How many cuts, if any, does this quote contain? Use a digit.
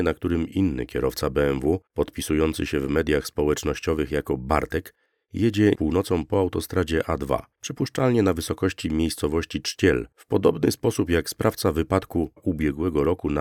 5